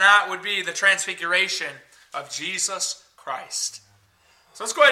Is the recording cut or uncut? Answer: uncut